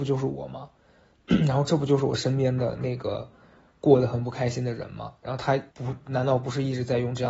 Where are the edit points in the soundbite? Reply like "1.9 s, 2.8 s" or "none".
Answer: 5.7 s